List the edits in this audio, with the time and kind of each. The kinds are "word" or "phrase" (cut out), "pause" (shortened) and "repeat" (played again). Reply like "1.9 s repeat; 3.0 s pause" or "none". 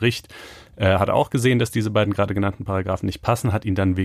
none